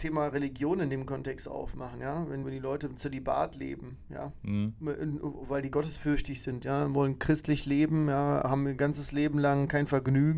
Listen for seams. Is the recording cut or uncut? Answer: cut